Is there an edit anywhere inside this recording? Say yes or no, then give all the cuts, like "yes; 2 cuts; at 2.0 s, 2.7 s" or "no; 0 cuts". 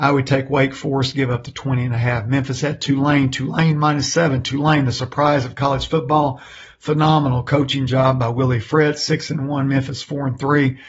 no; 0 cuts